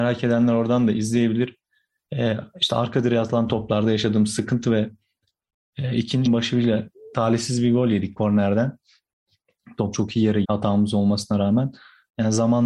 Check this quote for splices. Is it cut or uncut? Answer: cut